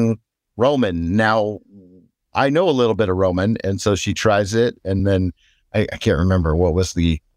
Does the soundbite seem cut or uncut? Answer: uncut